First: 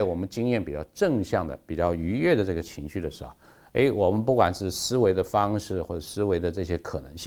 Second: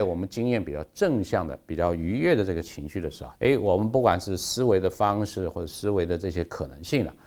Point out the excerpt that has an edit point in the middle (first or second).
second